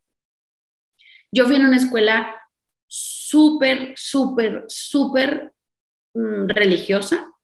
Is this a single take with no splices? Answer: yes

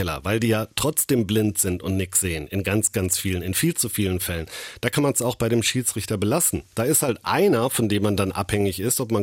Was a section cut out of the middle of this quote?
no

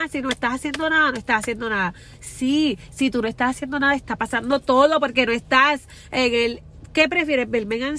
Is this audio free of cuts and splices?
yes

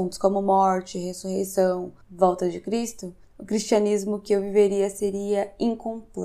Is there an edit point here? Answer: yes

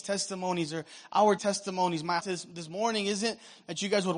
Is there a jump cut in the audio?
yes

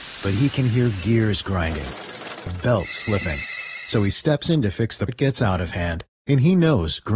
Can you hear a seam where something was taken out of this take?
yes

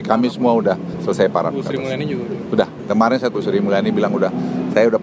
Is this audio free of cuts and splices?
no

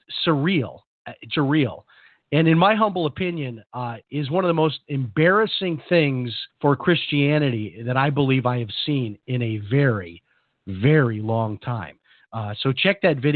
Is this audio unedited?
no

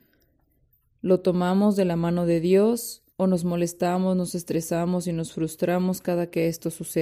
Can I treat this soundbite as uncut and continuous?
no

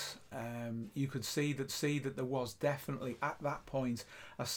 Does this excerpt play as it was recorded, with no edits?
no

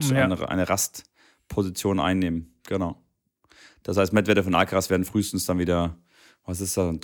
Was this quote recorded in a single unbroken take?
yes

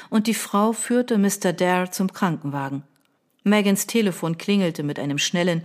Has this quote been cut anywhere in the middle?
no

